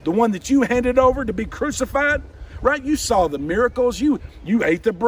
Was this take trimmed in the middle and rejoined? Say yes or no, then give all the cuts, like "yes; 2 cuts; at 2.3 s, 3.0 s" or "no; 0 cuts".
no; 0 cuts